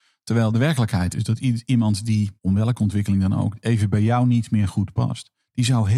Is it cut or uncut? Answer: cut